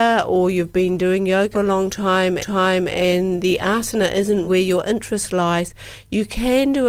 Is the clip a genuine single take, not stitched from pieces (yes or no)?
no